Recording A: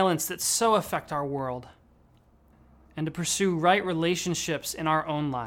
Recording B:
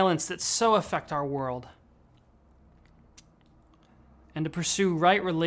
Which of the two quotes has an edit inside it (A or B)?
A